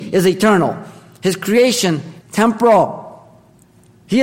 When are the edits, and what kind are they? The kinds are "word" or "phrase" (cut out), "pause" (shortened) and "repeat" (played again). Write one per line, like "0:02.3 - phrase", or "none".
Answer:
0:02.2 - word